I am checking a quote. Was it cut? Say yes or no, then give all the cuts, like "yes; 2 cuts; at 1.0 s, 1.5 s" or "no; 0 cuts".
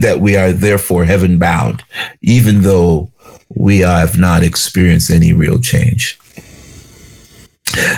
no; 0 cuts